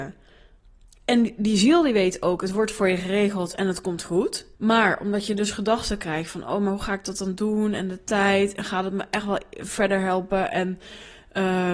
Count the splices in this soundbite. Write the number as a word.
one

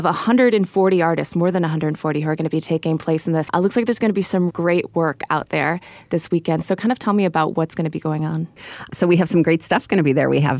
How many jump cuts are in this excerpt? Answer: one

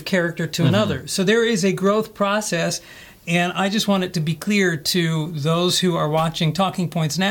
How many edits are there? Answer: zero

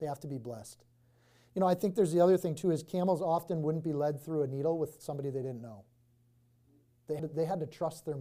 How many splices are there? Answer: one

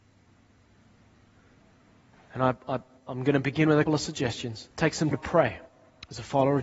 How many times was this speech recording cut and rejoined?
three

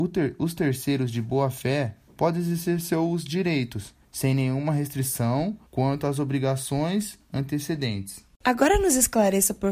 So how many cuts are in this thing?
three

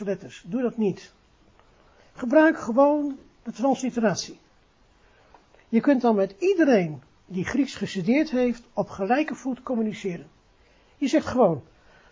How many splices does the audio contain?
zero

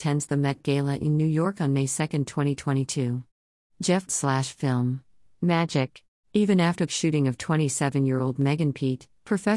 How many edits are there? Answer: three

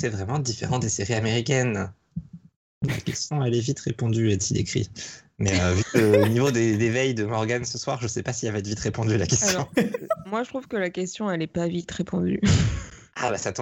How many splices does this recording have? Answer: zero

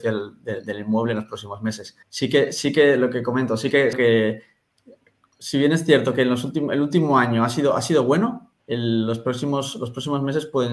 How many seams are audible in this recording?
three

